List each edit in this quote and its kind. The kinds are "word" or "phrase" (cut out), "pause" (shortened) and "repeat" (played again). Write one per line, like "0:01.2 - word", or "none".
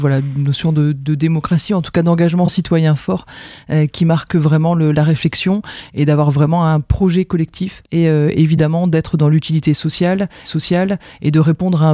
0:07.9 - pause
0:10.5 - repeat